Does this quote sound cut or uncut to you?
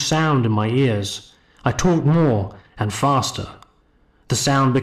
uncut